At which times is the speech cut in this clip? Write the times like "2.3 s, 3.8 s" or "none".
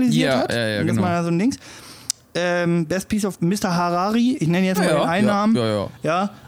3.4 s, 4.8 s